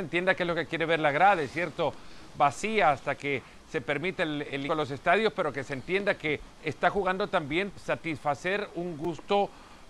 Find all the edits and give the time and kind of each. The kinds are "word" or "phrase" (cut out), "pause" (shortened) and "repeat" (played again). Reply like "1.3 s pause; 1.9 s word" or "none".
4.7 s phrase; 7.7 s word